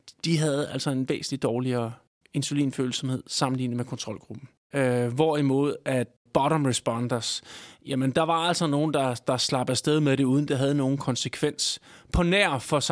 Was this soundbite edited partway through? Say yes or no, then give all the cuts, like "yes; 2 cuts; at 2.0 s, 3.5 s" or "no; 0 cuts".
no; 0 cuts